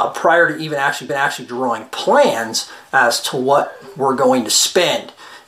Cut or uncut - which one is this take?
cut